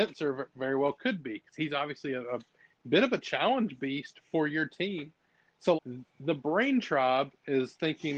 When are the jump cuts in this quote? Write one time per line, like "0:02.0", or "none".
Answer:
0:05.7